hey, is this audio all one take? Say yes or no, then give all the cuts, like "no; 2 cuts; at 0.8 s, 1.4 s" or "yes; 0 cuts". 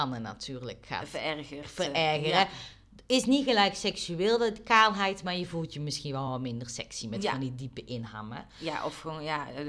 yes; 0 cuts